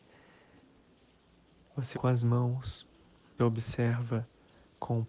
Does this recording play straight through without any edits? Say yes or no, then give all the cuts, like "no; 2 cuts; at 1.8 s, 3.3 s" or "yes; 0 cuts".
no; 2 cuts; at 1.9 s, 3.4 s